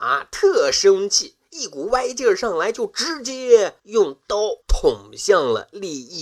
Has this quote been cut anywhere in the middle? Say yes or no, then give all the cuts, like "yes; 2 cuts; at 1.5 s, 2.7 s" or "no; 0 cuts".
yes; 2 cuts; at 3.8 s, 4.6 s